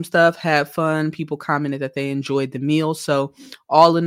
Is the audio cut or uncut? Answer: uncut